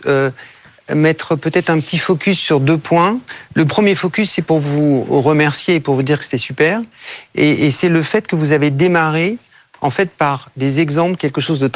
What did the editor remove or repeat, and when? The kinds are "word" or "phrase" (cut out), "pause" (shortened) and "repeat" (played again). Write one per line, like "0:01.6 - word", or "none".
none